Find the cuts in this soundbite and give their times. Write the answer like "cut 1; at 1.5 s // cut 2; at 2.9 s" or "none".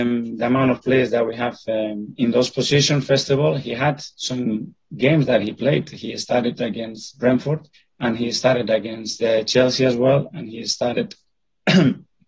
cut 1; at 7.7 s